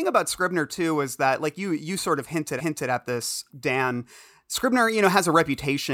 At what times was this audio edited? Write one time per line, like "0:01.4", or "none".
0:02.6
0:03.5